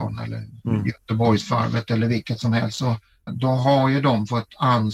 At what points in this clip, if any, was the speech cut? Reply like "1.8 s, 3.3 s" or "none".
3.3 s